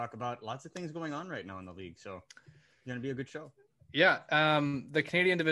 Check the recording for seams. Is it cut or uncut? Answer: uncut